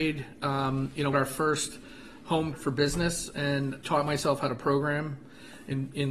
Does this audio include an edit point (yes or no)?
yes